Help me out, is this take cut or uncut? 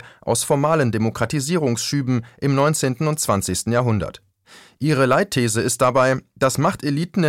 uncut